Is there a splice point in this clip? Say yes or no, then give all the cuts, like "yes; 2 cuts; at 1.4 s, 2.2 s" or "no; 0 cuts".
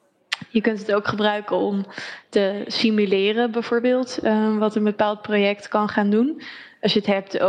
no; 0 cuts